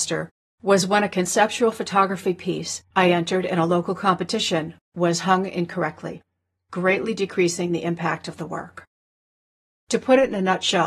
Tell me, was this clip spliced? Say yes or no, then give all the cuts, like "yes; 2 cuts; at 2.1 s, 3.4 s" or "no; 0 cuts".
no; 0 cuts